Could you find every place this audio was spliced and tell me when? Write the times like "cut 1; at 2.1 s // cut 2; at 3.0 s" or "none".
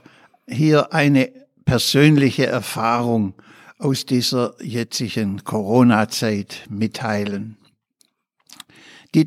none